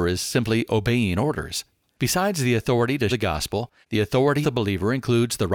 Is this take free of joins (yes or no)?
no